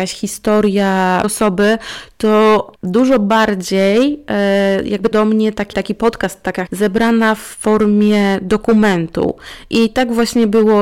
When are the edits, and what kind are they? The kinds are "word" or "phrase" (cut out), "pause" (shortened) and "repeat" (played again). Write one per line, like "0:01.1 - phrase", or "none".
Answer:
0:01.2 - word
0:02.8 - pause
0:05.1 - word
0:05.7 - word
0:06.7 - word